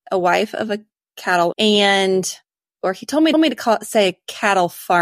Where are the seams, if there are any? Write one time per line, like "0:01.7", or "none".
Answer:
0:01.5
0:03.3

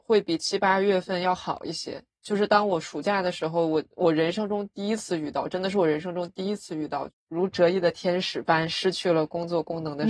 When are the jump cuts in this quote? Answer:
none

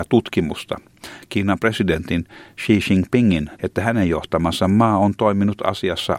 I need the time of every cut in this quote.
0:03.5

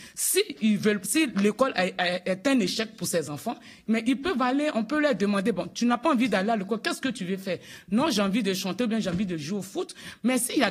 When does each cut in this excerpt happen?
none

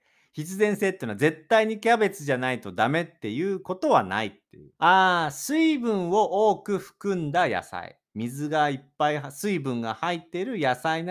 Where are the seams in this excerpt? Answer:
0:04.8

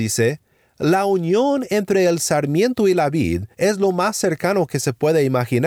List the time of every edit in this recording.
0:03.5

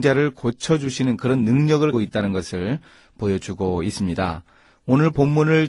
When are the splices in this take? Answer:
0:01.9

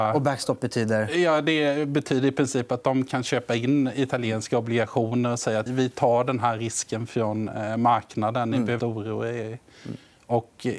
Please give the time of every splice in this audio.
0:05.7
0:08.8

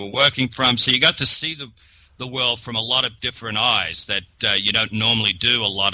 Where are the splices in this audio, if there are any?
none

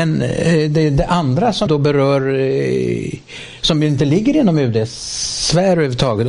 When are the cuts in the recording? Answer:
0:01.7

